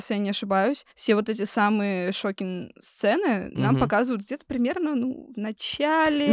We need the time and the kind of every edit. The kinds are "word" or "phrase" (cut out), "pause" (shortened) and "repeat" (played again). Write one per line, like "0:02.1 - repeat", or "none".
0:00.9 - pause

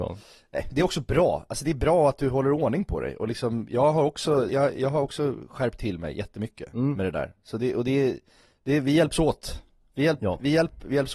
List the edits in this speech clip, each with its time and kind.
0:04.5 - word

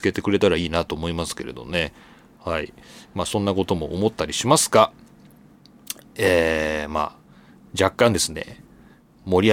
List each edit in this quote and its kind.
none

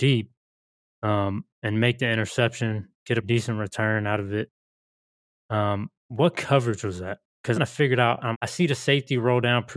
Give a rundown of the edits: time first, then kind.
0:03.2 - word
0:06.0 - pause
0:07.6 - phrase
0:08.3 - word

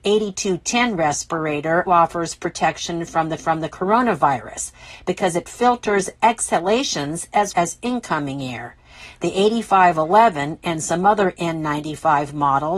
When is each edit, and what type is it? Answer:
0:01.9 - word
0:03.4 - repeat
0:07.5 - word

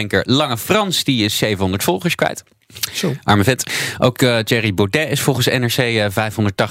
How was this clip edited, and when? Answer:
none

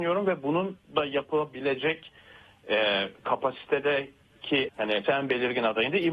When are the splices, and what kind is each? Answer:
0:04.7 - word
0:05.0 - word

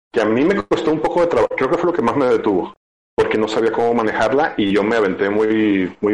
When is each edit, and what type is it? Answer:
none

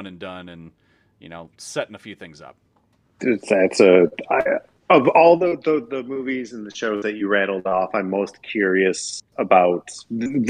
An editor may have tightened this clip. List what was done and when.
0:02.9 - pause
0:04.8 - pause

